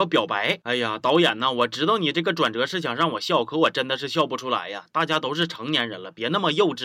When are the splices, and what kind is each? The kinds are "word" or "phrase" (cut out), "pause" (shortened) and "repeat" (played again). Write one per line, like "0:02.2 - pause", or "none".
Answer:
none